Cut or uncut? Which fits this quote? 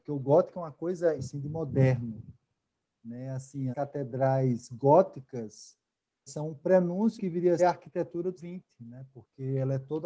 cut